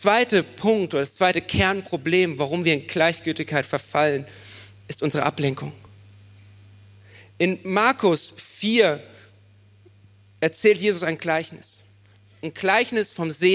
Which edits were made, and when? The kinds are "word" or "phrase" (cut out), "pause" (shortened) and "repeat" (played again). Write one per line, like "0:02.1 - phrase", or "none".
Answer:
none